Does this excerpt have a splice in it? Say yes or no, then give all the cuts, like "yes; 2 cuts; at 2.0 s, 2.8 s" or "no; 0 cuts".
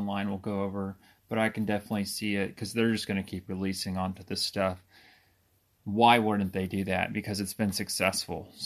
no; 0 cuts